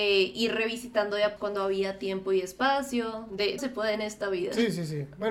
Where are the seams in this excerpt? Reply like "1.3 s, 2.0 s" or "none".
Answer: 1.4 s, 3.6 s